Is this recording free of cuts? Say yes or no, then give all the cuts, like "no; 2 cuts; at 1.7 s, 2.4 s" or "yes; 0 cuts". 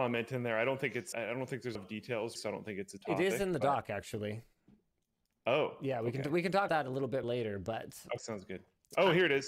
no; 7 cuts; at 1.1 s, 1.8 s, 2.4 s, 3.0 s, 6.7 s, 7.2 s, 8.2 s